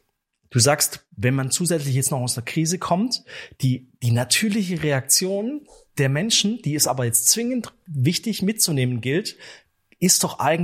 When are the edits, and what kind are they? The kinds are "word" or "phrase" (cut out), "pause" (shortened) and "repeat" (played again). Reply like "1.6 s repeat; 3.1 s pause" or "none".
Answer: none